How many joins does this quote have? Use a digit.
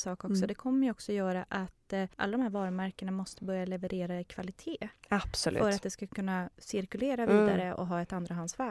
1